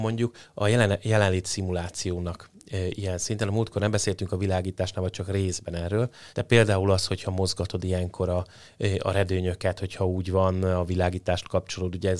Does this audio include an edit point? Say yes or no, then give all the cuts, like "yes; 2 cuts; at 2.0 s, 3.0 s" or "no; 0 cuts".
yes; 1 cut; at 6.3 s